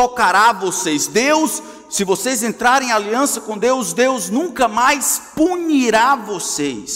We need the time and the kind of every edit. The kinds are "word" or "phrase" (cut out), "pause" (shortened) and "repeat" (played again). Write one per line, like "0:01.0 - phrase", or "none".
none

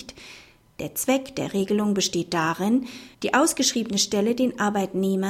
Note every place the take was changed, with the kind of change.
0:03.1 - pause

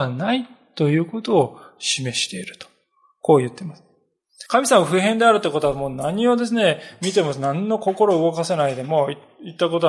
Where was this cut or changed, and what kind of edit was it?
0:04.5 - pause

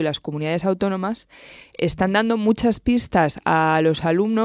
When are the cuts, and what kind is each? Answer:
none

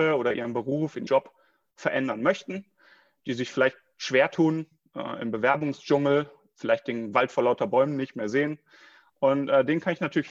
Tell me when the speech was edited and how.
0:01.1 - word

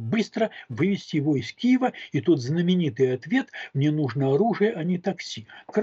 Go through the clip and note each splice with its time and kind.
none

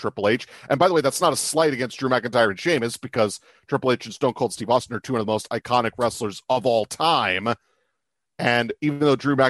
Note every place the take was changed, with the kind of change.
none

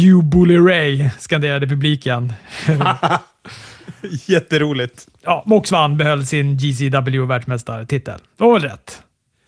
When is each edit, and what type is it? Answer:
none

